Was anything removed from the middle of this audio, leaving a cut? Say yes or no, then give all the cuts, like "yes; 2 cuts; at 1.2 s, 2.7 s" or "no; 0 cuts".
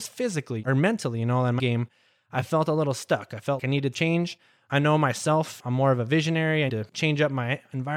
yes; 4 cuts; at 1.6 s, 3.6 s, 3.9 s, 6.7 s